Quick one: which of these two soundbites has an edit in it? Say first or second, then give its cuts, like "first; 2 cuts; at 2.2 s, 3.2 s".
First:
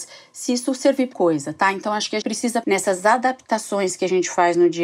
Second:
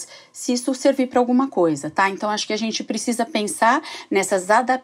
first; 3 cuts; at 1.1 s, 2.2 s, 2.6 s